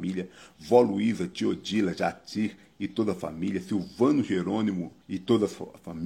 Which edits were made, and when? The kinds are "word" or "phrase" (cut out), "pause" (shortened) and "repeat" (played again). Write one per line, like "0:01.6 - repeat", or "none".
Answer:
0:05.0 - pause